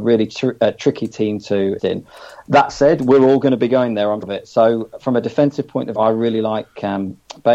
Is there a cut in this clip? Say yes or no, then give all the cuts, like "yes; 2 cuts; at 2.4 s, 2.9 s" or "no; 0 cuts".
yes; 3 cuts; at 1.8 s, 4.2 s, 6.0 s